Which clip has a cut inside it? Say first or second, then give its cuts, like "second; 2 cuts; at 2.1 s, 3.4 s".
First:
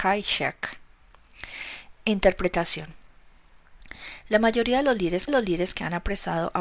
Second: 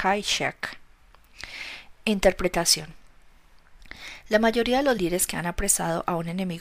first; 1 cut; at 5.3 s